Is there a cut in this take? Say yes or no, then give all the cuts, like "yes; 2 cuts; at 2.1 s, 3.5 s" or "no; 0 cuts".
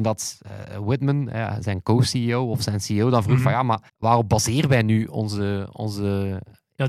yes; 1 cut; at 3.9 s